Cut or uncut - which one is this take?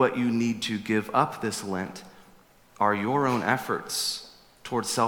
uncut